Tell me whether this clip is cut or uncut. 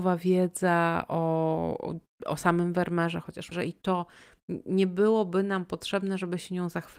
cut